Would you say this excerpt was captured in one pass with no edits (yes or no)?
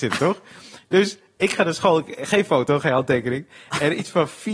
yes